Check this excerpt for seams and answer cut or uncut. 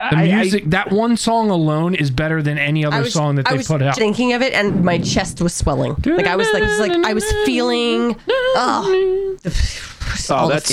cut